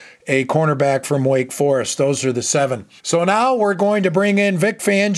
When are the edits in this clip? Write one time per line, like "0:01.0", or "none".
0:03.0